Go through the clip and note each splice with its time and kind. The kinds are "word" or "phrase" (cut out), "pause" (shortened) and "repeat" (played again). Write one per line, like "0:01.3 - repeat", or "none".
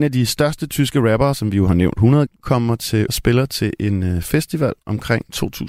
0:02.3 - phrase
0:03.1 - word